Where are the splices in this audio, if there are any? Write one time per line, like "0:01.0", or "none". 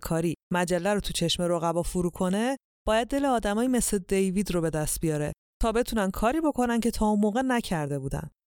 none